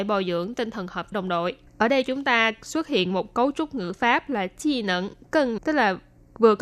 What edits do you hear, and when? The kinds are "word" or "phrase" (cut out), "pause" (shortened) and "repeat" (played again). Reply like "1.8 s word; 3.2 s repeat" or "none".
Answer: 1.1 s phrase; 1.7 s pause; 5.6 s word